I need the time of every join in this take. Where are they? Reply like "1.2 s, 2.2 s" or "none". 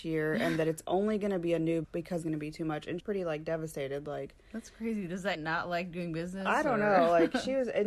1.8 s, 2.2 s, 3.0 s, 5.3 s

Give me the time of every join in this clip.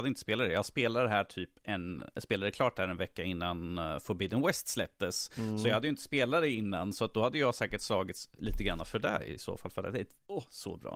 none

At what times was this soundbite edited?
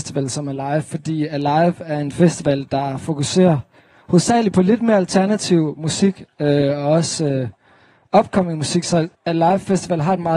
9.1 s

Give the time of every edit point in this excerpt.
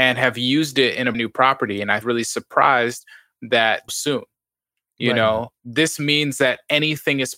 1.1 s, 2.0 s, 3.9 s, 5.5 s

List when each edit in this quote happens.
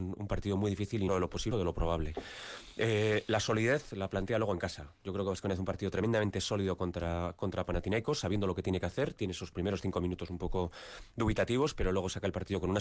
1.1 s, 1.5 s

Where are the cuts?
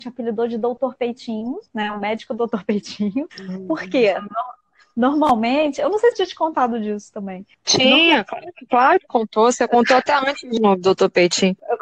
1.7 s, 3.3 s, 6.1 s, 7.5 s, 10.6 s

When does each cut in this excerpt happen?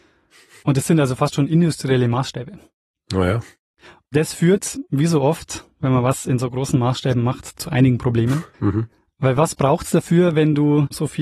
8.5 s

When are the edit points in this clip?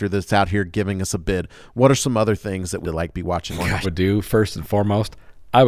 2.8 s, 3.5 s, 3.8 s

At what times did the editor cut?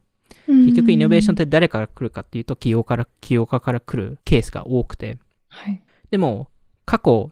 4.2 s, 5.4 s, 5.9 s

